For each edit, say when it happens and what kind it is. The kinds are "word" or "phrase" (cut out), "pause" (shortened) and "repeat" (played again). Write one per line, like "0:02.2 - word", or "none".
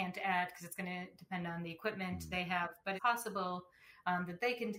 0:03.0 - word